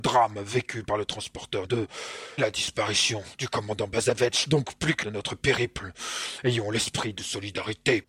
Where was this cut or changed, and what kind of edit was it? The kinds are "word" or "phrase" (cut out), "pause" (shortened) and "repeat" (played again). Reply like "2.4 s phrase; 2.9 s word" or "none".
1.7 s word; 2.4 s word; 5.0 s phrase